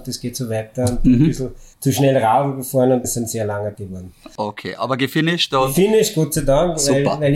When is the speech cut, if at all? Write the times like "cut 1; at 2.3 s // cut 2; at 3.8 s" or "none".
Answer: cut 1; at 1.7 s // cut 2; at 3.0 s // cut 3; at 3.7 s